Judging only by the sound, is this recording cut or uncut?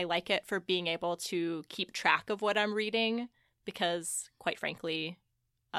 uncut